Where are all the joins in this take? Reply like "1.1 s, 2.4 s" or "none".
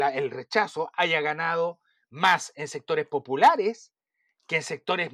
none

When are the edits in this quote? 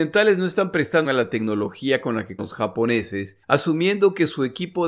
1.0 s, 2.4 s, 3.4 s

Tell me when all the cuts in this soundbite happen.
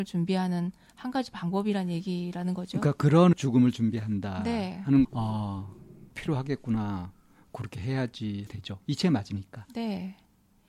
3.3 s, 5.0 s, 6.1 s, 8.5 s

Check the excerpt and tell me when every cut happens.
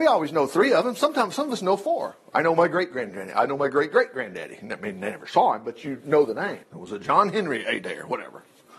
6.6 s

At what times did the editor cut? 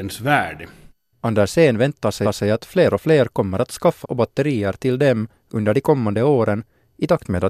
2.2 s, 4.0 s

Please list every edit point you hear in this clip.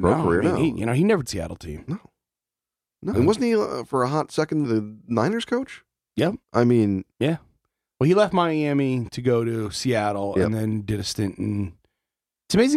1.2 s, 3.1 s, 4.6 s, 6.4 s, 7.1 s

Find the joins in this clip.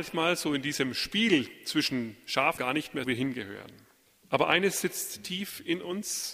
2.6 s, 3.0 s

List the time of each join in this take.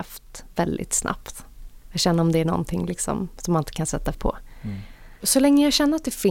4.1 s

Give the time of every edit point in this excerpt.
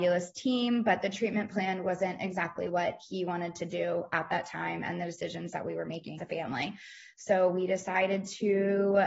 6.2 s

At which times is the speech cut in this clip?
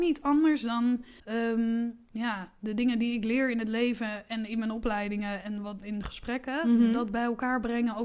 1.2 s, 5.4 s

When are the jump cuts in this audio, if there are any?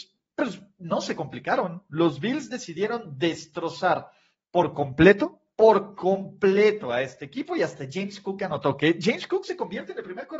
none

